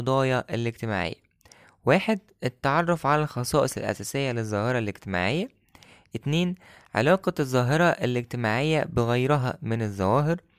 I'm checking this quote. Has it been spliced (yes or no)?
no